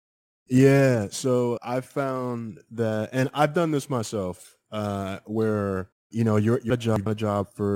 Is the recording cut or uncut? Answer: cut